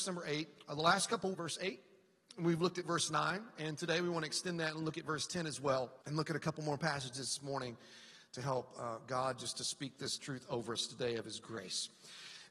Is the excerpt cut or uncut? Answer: cut